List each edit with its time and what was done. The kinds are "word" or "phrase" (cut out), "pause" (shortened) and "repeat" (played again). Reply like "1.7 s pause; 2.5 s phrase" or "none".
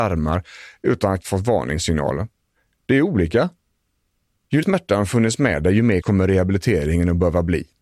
1.2 s word; 4.6 s word; 6.0 s word